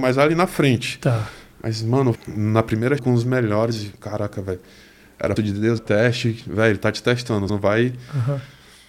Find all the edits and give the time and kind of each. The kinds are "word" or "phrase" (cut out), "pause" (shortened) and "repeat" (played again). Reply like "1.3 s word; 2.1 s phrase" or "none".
2.1 s word; 3.0 s word; 5.4 s word; 5.8 s word; 7.5 s word